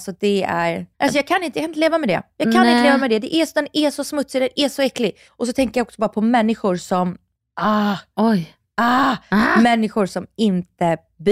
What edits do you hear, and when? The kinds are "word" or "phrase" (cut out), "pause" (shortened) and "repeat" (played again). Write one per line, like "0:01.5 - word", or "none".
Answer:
0:00.9 - pause
0:05.3 - pause
0:07.4 - pause